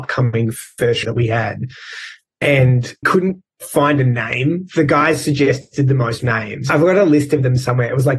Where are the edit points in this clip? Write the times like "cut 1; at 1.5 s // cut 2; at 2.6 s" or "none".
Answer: cut 1; at 1.0 s // cut 2; at 3.0 s // cut 3; at 6.2 s